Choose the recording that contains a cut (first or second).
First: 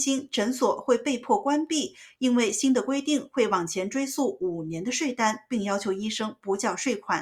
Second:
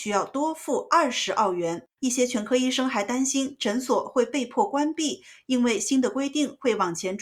second